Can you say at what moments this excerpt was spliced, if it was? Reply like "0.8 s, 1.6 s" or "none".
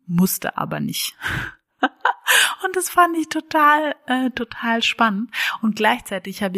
none